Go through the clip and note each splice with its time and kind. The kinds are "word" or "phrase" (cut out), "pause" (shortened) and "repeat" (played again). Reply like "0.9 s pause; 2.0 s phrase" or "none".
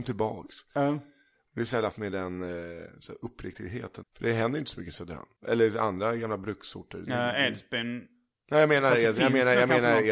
1.9 s word; 4.0 s word; 5.4 s pause